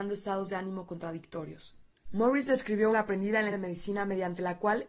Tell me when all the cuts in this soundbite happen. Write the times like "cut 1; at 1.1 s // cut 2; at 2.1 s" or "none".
cut 1; at 1.9 s // cut 2; at 2.9 s // cut 3; at 3.5 s